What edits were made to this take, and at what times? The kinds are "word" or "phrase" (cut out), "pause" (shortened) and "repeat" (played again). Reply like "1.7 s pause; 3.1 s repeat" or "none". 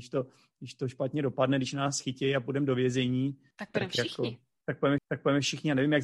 3.5 s pause; 5.0 s repeat